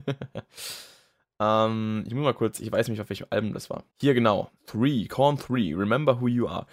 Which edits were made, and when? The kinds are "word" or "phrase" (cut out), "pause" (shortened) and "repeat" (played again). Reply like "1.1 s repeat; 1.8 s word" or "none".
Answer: 3.9 s pause; 4.6 s pause